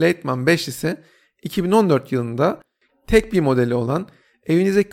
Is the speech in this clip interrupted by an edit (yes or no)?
yes